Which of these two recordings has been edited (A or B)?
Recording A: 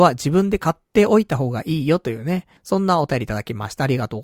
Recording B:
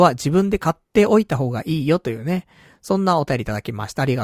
A